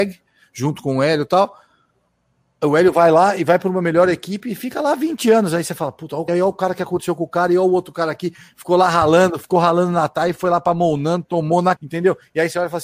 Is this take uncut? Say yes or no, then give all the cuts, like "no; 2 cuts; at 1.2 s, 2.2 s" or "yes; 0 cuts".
no; 2 cuts; at 6.3 s, 11.8 s